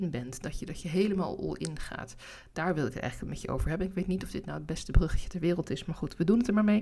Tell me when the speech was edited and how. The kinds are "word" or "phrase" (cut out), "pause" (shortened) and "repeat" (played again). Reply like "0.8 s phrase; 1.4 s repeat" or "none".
none